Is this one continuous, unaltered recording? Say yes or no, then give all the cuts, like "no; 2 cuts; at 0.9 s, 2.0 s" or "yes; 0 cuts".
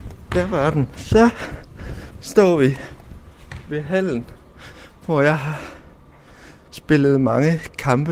yes; 0 cuts